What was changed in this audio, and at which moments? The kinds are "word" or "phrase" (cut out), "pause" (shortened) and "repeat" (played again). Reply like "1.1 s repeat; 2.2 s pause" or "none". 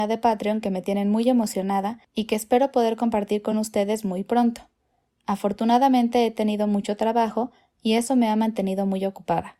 none